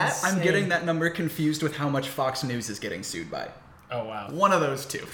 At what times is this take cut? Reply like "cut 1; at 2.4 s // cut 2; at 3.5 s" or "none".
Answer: none